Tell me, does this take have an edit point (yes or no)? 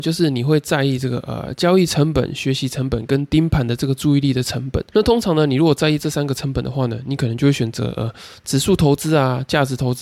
yes